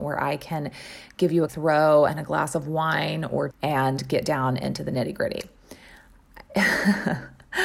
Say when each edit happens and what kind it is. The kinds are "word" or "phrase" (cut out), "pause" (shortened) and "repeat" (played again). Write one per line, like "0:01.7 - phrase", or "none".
0:01.5 - word
0:03.5 - word